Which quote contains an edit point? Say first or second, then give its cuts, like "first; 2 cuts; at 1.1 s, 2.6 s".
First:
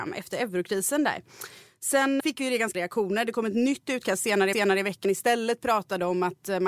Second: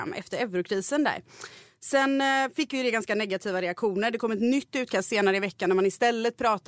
first; 4 cuts; at 2.2 s, 2.7 s, 4.5 s, 5.0 s